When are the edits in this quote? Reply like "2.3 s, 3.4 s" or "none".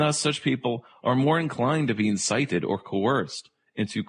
none